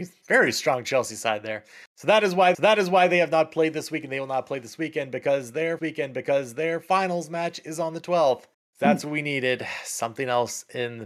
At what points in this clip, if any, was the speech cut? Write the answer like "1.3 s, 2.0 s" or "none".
2.5 s, 5.8 s, 8.5 s